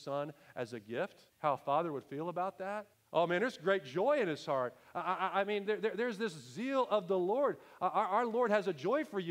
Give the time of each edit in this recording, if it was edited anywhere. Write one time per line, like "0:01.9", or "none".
0:01.3
0:02.9